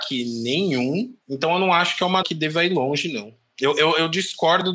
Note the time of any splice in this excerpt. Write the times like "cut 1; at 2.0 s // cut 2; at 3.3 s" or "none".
cut 1; at 1.2 s // cut 2; at 2.2 s